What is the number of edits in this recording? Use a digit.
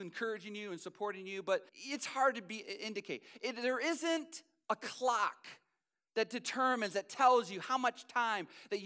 1